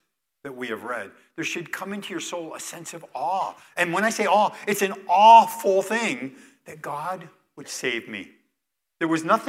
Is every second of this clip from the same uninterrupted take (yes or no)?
yes